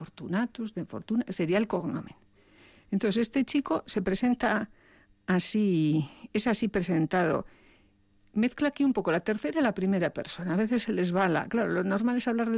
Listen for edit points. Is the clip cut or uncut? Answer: uncut